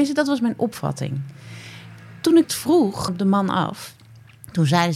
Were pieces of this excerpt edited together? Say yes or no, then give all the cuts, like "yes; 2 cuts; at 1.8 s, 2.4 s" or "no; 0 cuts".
yes; 2 cuts; at 2.4 s, 3.1 s